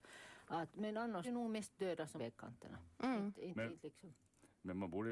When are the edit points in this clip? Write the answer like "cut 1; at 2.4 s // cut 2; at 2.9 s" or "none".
cut 1; at 1.2 s // cut 2; at 2.2 s

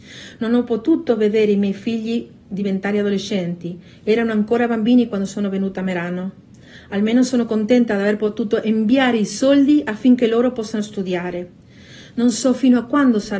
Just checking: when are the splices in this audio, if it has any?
none

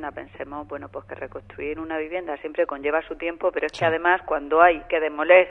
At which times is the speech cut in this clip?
none

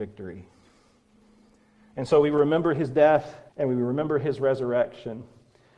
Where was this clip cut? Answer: cut 1; at 3.5 s

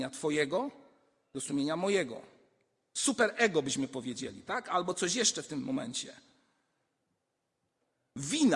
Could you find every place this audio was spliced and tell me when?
none

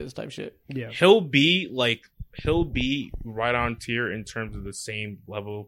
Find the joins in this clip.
none

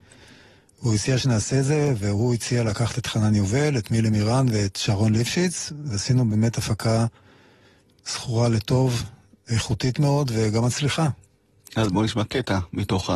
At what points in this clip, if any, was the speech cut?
none

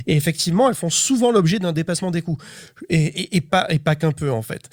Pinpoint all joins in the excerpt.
none

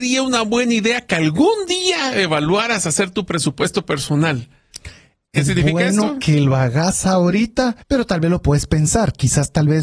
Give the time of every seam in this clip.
cut 1; at 7.8 s

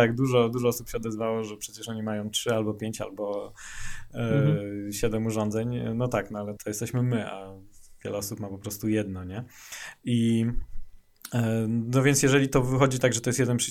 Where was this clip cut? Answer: cut 1; at 6.6 s

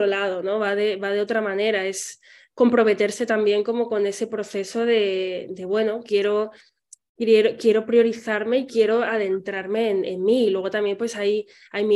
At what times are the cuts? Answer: none

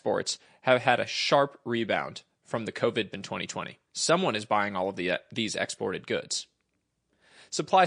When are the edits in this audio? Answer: cut 1; at 3.1 s // cut 2; at 3.9 s

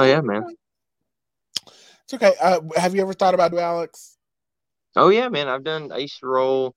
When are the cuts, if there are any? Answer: cut 1; at 3.5 s

